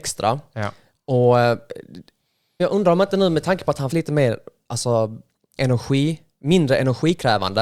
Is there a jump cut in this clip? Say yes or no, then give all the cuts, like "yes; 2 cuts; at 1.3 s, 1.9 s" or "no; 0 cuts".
yes; 2 cuts; at 2.6 s, 3.9 s